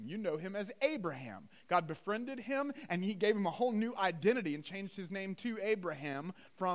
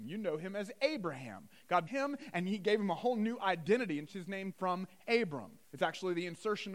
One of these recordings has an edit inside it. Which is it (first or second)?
second